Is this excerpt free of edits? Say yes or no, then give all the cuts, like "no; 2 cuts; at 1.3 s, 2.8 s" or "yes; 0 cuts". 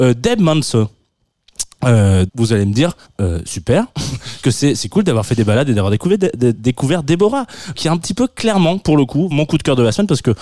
no; 5 cuts; at 2.3 s, 3.0 s, 4.4 s, 7.7 s, 9.3 s